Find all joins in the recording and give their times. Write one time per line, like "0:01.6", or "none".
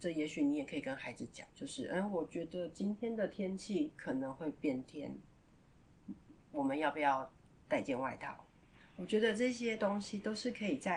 0:01.5